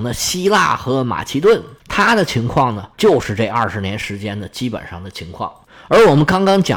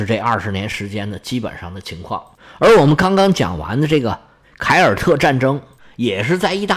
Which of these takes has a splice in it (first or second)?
first